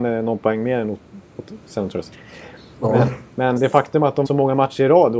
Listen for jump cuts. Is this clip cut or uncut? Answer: cut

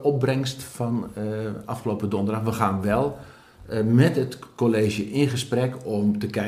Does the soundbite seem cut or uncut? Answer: uncut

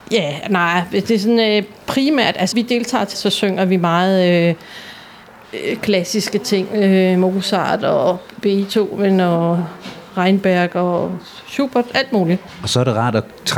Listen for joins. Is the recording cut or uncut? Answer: cut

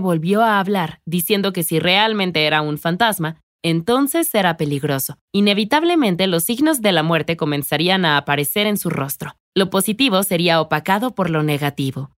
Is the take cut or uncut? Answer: cut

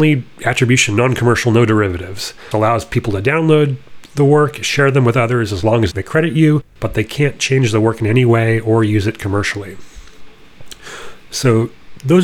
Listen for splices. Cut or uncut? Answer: cut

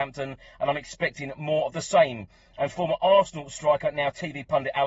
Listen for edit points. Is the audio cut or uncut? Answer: uncut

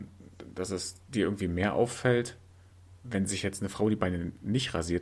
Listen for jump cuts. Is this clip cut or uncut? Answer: uncut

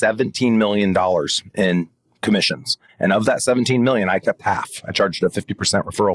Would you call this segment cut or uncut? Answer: uncut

